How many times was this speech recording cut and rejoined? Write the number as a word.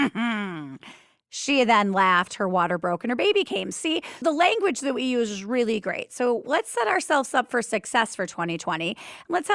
one